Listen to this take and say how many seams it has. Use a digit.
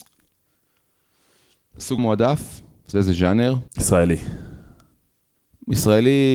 3